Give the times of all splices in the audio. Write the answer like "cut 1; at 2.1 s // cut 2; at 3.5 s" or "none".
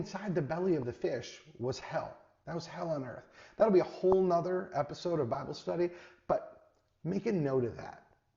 none